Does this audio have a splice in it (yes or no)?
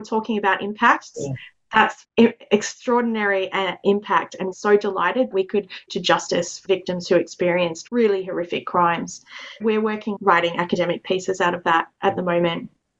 yes